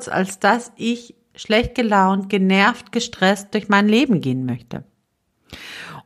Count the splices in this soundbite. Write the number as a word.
zero